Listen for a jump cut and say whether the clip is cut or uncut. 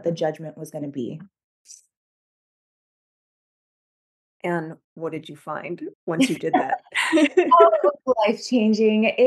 cut